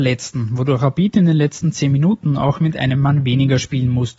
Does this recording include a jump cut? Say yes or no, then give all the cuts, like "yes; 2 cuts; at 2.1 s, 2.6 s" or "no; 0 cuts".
no; 0 cuts